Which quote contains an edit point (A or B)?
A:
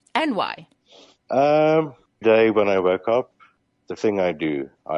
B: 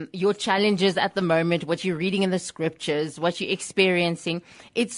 A